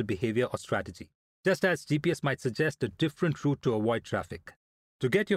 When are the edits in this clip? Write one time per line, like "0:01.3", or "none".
none